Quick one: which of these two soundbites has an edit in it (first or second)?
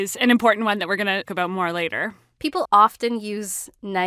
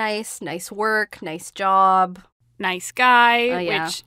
first